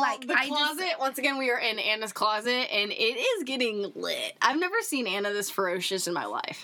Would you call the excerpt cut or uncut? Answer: uncut